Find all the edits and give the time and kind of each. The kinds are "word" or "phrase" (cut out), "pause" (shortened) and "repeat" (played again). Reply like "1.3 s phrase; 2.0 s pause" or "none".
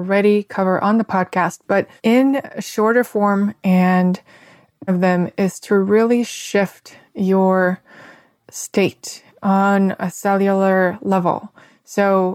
2.0 s pause; 4.9 s phrase

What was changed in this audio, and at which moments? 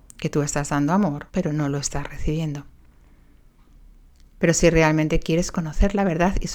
1.3 s pause

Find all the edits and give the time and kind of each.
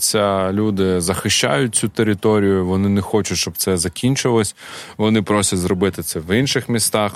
none

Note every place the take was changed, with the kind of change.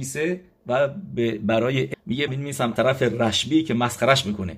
1.9 s word; 2.3 s phrase; 2.8 s word

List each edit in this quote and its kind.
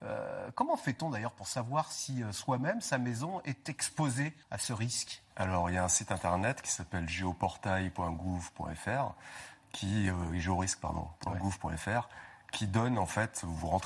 4.4 s pause; 5.3 s pause

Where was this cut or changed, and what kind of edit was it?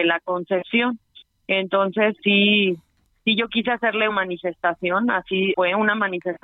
2.2 s word; 4.1 s word; 5.5 s word

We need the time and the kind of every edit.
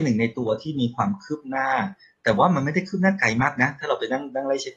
none

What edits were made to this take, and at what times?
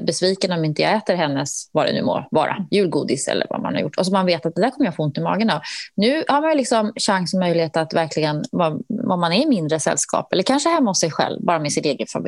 none

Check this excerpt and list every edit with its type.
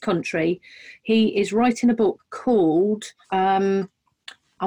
3.2 s pause

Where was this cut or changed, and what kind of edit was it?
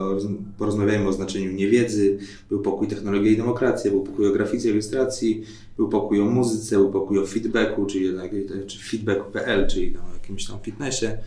none

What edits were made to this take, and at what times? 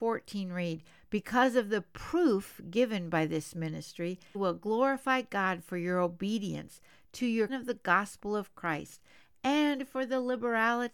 4.3 s word; 7.5 s word

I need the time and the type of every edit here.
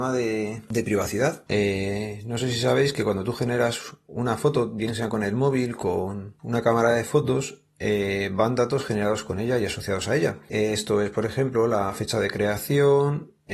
none

